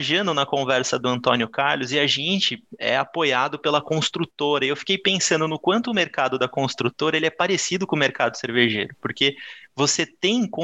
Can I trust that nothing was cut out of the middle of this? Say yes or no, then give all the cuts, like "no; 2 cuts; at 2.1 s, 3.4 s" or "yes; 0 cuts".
yes; 0 cuts